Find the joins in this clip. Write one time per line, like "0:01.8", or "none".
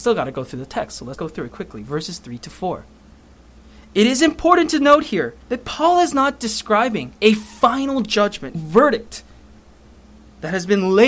0:01.1
0:05.4
0:07.2
0:08.5